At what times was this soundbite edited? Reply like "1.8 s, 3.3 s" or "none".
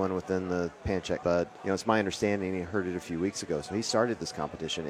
1.2 s, 1.6 s